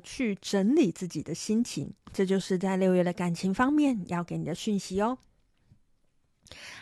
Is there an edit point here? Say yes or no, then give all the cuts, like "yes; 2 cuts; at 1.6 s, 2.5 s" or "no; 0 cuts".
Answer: yes; 1 cut; at 2.0 s